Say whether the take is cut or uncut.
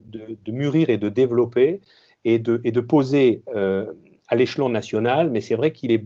uncut